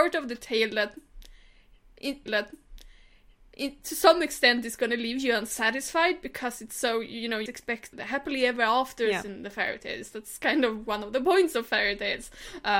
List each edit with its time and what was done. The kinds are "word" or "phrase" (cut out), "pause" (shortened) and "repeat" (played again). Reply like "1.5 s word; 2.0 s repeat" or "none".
2.3 s repeat; 7.5 s word; 7.9 s word

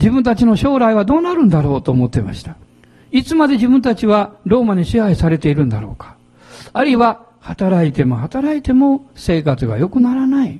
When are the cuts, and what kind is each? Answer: 2.7 s pause

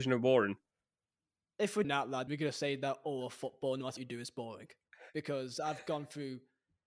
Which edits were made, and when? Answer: 1.8 s word; 2.3 s word; 4.0 s word

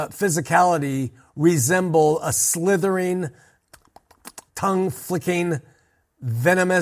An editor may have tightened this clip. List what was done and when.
4.5 s pause

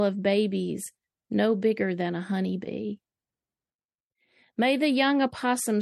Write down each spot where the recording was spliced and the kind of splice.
none

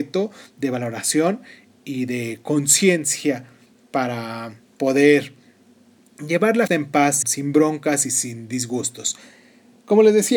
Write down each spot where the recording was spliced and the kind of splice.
6.7 s word; 7.2 s word

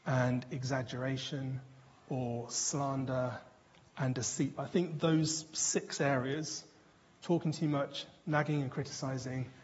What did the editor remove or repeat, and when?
none

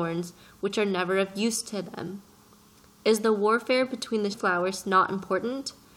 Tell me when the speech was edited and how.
4.3 s phrase

